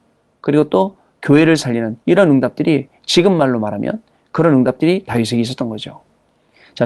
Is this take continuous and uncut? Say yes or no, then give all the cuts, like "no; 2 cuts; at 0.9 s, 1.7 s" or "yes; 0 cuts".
no; 1 cut; at 2.0 s